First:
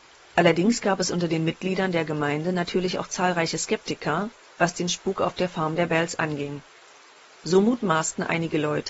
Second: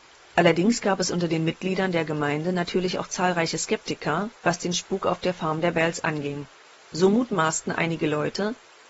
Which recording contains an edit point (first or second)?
second